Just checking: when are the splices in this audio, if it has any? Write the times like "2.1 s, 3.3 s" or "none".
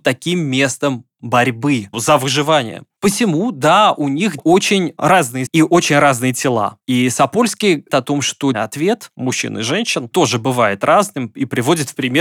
1.9 s, 4.4 s, 5.5 s, 7.9 s, 8.5 s, 9.1 s, 10.1 s